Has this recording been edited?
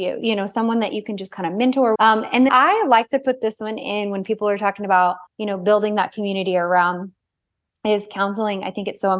yes; 3 cuts; at 2.0 s, 2.5 s, 5.3 s

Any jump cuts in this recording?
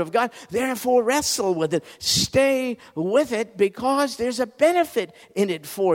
no; 0 cuts

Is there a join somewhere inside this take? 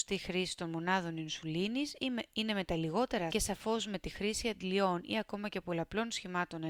yes; 1 cut; at 3.3 s

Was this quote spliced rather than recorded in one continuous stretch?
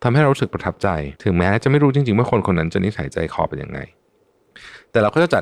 yes; 1 cut; at 1.2 s

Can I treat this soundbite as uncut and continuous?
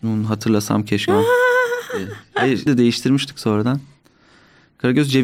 no; 2 cuts; at 1.1 s, 2.7 s

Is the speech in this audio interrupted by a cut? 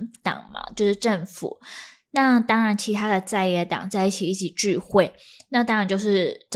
no; 0 cuts

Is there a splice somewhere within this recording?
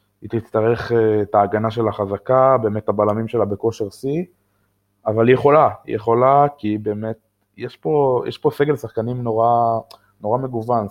no; 0 cuts

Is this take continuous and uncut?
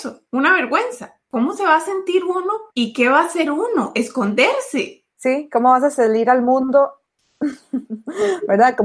no; 2 cuts; at 2.7 s, 5.1 s

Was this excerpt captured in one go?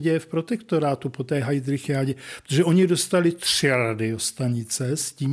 yes; 0 cuts

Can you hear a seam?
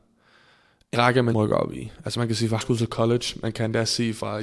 yes; 3 cuts; at 0.9 s, 1.3 s, 2.6 s

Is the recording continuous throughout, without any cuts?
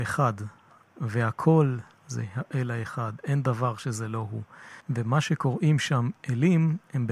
no; 1 cut; at 4.8 s

